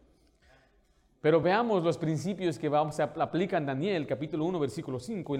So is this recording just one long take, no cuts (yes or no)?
yes